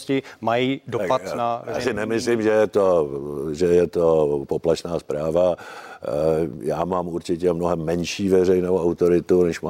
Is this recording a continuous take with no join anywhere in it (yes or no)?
yes